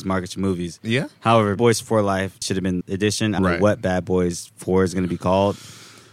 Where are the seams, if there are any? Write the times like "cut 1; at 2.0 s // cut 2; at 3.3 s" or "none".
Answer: cut 1; at 1.6 s // cut 2; at 2.4 s // cut 3; at 2.8 s // cut 4; at 3.4 s